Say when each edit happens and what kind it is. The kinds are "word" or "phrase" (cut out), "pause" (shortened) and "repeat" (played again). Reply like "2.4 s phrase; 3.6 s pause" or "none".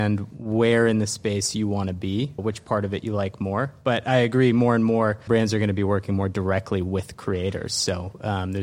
2.4 s word; 5.3 s word